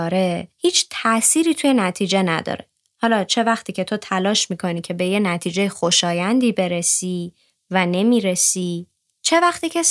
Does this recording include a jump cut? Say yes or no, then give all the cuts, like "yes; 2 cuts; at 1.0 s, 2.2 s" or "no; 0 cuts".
no; 0 cuts